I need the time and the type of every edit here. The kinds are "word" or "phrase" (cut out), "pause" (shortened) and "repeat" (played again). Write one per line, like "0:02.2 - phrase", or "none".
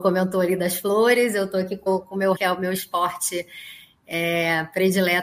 0:01.9 - word
0:02.3 - word